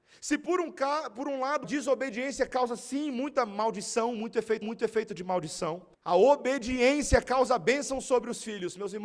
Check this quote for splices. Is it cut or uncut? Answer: cut